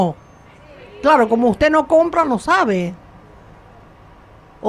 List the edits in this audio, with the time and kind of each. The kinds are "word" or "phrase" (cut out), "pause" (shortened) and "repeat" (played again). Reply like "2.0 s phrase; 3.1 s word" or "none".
none